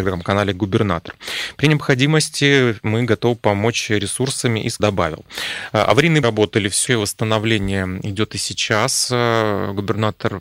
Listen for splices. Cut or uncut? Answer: cut